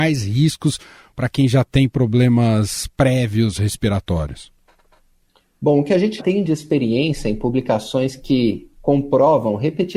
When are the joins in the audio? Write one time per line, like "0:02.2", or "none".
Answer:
0:06.2
0:08.8